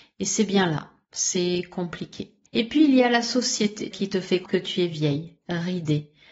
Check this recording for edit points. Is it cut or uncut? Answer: cut